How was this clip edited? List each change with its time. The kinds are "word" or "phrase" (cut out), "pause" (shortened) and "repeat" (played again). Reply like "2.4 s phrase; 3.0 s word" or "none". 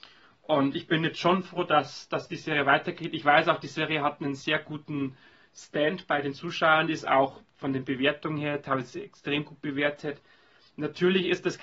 none

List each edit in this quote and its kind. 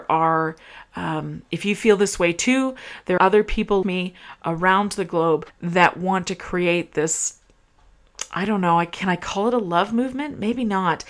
3.2 s word; 3.8 s word; 5.5 s pause

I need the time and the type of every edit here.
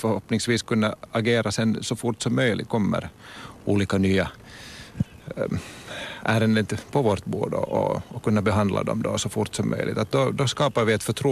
2.7 s phrase

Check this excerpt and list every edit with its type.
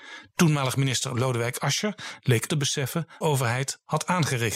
2.5 s phrase; 3.2 s phrase

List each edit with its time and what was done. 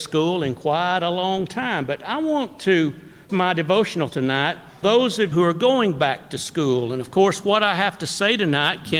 3.3 s word; 4.1 s word; 4.8 s word; 5.3 s word

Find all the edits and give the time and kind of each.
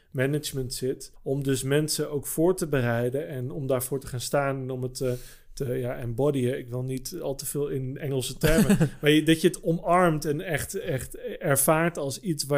1.2 s pause

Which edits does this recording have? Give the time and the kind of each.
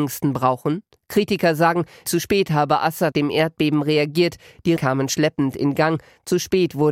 2.1 s word; 3.1 s word; 4.8 s word

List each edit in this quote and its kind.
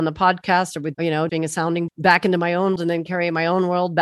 0.9 s word; 1.3 s word; 1.9 s word; 2.8 s word

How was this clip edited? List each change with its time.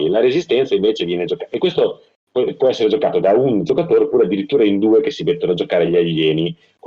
none

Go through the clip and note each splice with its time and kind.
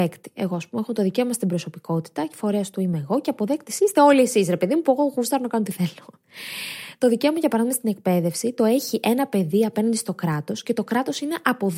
none

